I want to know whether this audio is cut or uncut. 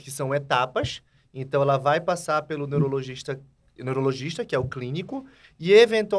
uncut